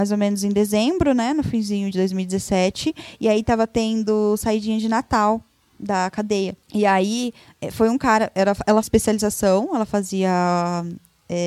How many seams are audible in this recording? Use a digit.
3